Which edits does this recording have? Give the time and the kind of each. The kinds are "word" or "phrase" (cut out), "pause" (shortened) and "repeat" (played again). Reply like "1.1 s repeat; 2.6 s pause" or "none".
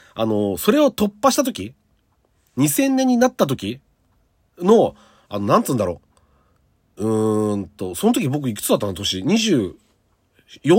none